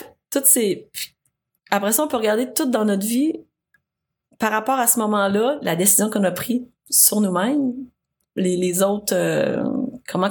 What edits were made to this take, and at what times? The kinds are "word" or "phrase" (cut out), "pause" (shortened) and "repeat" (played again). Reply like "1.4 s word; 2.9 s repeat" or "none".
none